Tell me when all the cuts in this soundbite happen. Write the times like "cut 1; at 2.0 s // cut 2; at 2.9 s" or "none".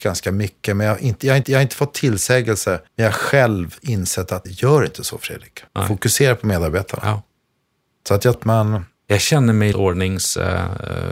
cut 1; at 1.4 s // cut 2; at 2.9 s // cut 3; at 4.4 s // cut 4; at 5.7 s // cut 5; at 8.3 s // cut 6; at 8.9 s // cut 7; at 9.7 s

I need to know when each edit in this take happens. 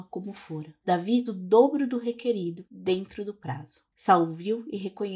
cut 1; at 1.3 s

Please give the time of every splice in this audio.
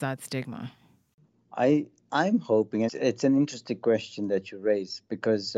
cut 1; at 2.9 s

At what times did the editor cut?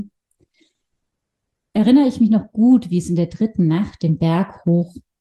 none

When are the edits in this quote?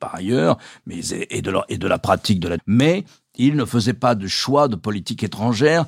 cut 1; at 2.6 s

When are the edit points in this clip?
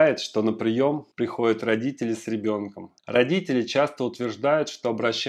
cut 1; at 1.1 s // cut 2; at 3.0 s

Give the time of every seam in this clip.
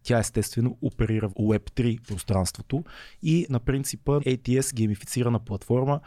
cut 1; at 1.3 s // cut 2; at 2.0 s // cut 3; at 3.5 s // cut 4; at 4.2 s

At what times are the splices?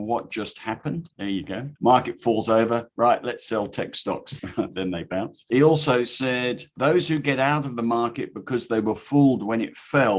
cut 1; at 1.8 s

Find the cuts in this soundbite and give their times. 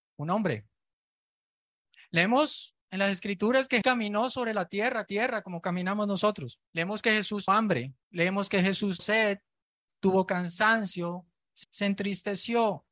cut 1; at 2.8 s // cut 2; at 3.8 s // cut 3; at 5.1 s // cut 4; at 6.7 s // cut 5; at 7.5 s // cut 6; at 8.0 s // cut 7; at 9.0 s // cut 8; at 11.6 s

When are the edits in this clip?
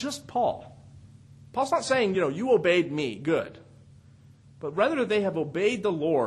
none

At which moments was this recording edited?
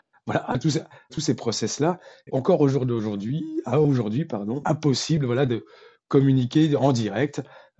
cut 1; at 1.1 s // cut 2; at 2.3 s // cut 3; at 4.6 s

